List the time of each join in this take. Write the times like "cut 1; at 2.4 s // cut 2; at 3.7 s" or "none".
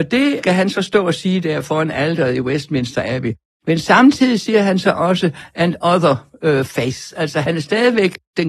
none